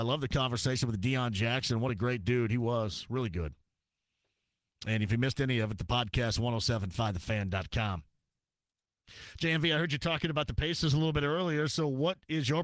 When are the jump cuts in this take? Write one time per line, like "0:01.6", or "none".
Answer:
none